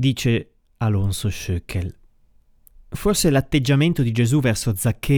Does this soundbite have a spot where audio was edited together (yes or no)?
no